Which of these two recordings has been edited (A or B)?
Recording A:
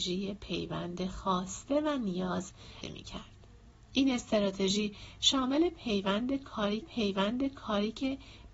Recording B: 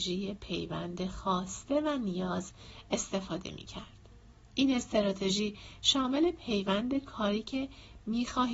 A